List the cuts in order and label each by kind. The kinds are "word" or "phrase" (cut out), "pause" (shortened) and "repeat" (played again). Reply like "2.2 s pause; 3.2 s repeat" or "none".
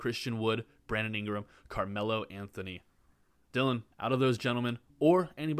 3.9 s pause